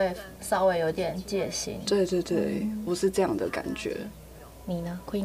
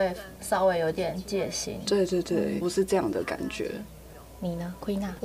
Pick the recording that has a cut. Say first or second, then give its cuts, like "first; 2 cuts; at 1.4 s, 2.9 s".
second; 1 cut; at 2.6 s